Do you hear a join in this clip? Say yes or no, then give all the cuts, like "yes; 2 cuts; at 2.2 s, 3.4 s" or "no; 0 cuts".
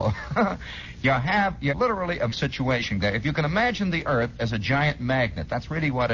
yes; 3 cuts; at 1.7 s, 2.3 s, 3.0 s